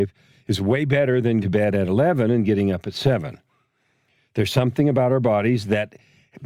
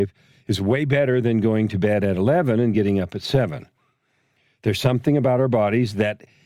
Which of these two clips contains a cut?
first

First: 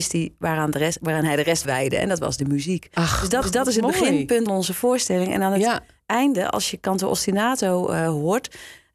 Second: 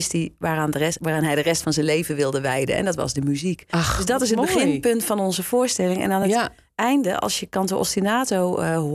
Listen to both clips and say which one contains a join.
first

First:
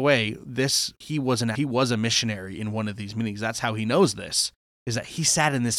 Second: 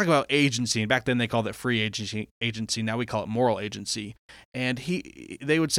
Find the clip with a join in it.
first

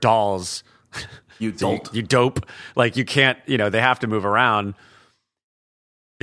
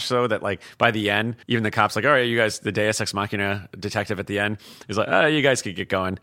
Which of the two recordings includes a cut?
second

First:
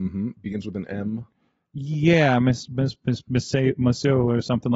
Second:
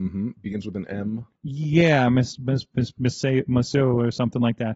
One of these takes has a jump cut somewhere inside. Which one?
second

